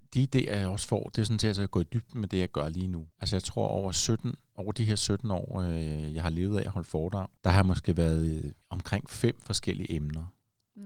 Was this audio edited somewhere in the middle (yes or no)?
yes